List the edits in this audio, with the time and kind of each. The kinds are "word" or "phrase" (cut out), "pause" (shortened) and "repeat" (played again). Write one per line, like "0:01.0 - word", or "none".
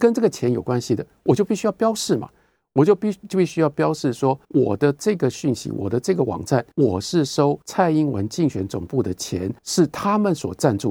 0:04.4 - pause
0:06.7 - pause
0:07.6 - pause
0:09.6 - pause